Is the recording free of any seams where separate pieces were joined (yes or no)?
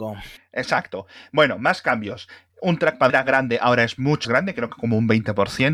no